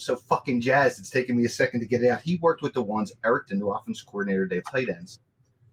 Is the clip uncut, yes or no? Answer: no